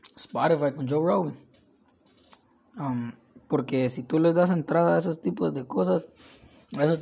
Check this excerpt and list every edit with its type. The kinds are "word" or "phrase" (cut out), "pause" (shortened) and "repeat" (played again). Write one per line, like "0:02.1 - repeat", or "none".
0:02.4 - pause